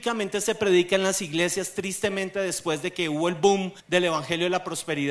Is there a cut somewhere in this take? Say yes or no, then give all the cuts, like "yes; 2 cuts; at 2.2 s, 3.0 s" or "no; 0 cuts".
yes; 1 cut; at 3.8 s